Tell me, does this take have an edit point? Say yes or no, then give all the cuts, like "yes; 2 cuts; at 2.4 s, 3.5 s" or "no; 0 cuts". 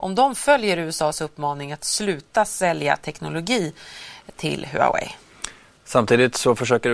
no; 0 cuts